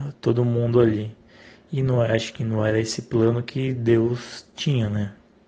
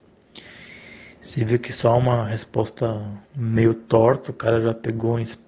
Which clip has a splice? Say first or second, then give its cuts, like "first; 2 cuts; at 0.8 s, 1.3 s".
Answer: second; 1 cut; at 3.3 s